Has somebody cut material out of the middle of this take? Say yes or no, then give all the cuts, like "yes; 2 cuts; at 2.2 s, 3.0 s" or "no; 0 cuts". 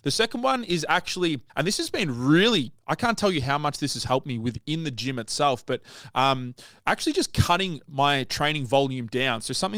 yes; 1 cut; at 1.5 s